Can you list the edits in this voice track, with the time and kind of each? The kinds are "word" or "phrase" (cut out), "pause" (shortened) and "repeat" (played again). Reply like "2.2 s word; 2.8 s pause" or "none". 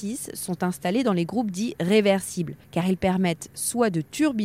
2.6 s pause